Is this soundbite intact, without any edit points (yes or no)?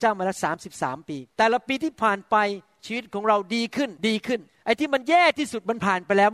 no